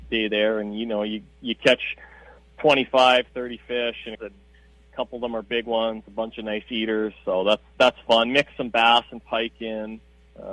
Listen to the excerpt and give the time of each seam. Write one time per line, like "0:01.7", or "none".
0:04.1